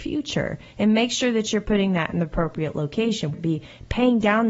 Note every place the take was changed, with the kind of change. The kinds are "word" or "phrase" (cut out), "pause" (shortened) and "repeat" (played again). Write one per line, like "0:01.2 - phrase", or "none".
0:03.3 - word